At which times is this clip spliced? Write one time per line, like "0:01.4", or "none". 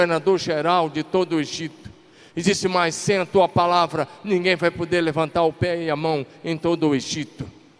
none